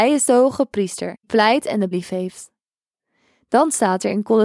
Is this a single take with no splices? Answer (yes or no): no